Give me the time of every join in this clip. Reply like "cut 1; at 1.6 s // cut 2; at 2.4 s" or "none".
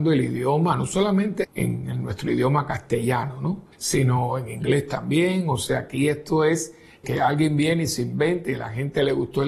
cut 1; at 1.4 s // cut 2; at 3.7 s // cut 3; at 7.0 s